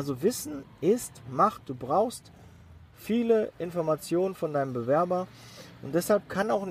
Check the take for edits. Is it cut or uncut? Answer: uncut